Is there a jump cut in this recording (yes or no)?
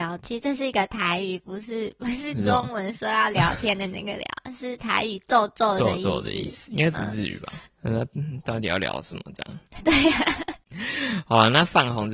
no